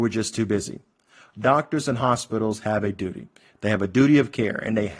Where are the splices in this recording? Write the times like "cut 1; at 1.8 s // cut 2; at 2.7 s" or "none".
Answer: none